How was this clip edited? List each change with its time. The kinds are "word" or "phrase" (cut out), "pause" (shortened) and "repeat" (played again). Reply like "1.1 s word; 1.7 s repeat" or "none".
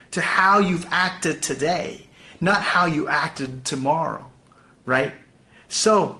none